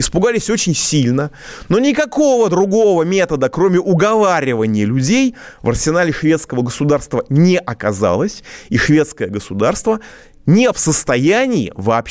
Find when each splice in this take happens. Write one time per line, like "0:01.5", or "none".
0:10.7